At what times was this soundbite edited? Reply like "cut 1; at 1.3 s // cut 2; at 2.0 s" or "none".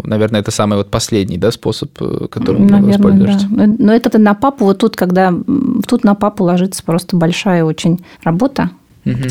cut 1; at 4.1 s // cut 2; at 8.1 s